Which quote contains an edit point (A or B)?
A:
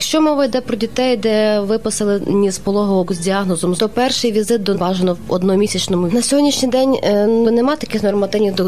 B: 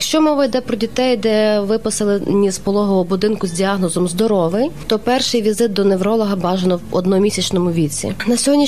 A